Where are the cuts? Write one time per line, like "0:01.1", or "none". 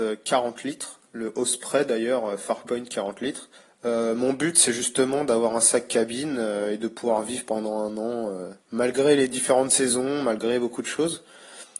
0:03.6
0:08.6